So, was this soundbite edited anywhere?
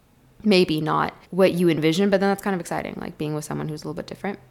yes; 1 cut; at 1.2 s

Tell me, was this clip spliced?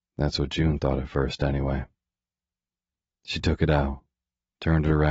no; 0 cuts

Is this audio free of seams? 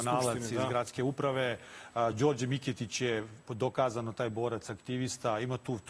yes; 0 cuts

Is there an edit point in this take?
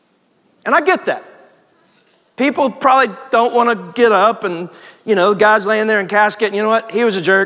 no; 0 cuts

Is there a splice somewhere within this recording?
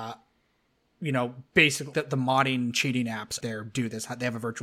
yes; 2 cuts; at 1.9 s, 3.4 s

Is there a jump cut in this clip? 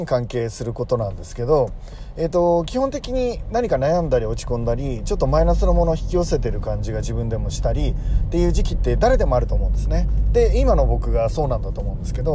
no; 0 cuts

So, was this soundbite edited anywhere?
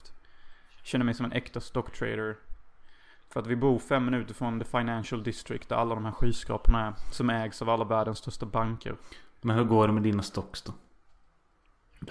no; 0 cuts

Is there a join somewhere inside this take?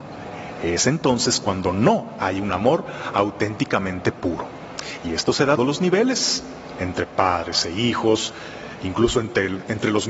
yes; 1 cut; at 5.6 s

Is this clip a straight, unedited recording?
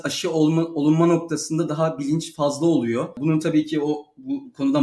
yes; 0 cuts

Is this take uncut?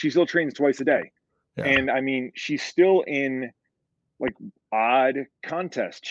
yes; 0 cuts

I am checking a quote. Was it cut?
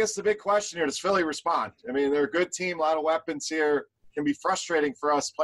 no; 0 cuts

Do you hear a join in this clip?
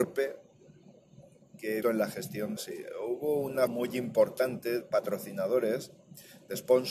yes; 4 cuts; at 1.8 s, 2.6 s, 3.7 s, 4.8 s

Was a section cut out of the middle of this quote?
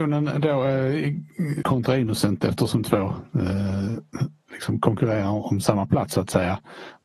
yes; 3 cuts; at 1.6 s, 2.8 s, 4.5 s

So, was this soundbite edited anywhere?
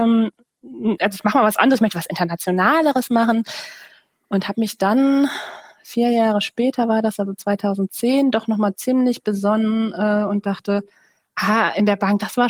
no; 0 cuts

